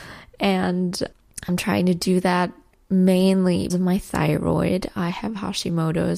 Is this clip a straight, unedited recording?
no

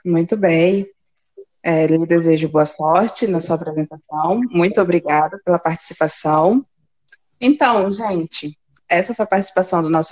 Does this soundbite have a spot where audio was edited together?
no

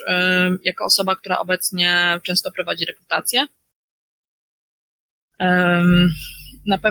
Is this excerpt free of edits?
yes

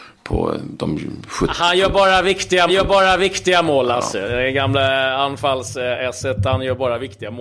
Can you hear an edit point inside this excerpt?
yes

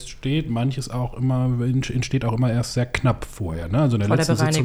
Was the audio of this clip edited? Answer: no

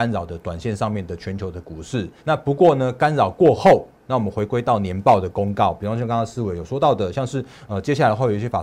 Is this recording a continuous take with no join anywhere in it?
no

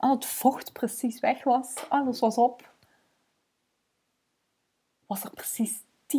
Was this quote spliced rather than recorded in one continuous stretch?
no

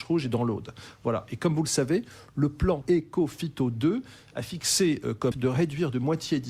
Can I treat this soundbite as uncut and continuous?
no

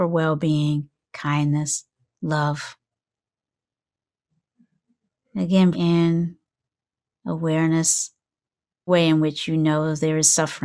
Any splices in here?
yes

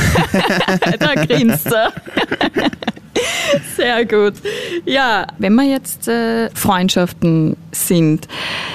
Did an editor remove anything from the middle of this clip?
yes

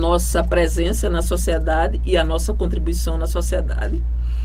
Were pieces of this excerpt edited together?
no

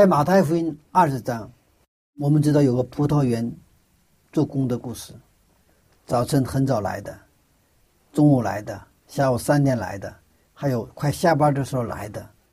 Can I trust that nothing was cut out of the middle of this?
yes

